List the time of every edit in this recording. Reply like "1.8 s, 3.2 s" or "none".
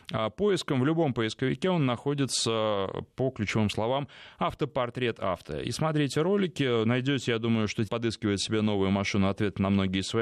7.9 s